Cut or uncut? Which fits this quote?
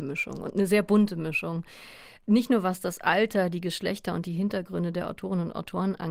uncut